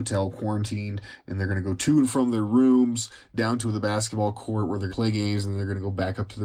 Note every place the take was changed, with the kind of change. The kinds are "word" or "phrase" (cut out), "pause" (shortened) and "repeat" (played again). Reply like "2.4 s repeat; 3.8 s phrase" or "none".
4.9 s word